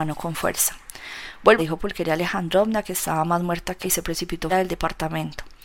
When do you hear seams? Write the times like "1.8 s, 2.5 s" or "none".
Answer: 1.6 s, 3.8 s, 4.5 s